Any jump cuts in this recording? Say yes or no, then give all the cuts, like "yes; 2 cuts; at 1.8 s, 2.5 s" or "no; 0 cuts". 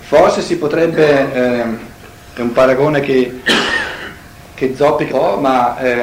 yes; 1 cut; at 5.1 s